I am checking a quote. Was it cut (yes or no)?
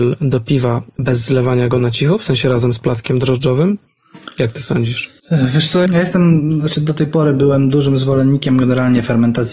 yes